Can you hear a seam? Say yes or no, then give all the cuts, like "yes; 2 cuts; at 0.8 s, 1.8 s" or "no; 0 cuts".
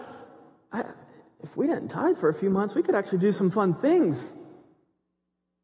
no; 0 cuts